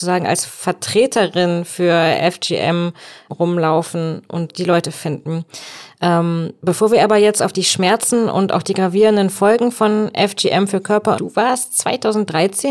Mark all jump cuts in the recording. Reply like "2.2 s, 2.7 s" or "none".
4.5 s, 11.2 s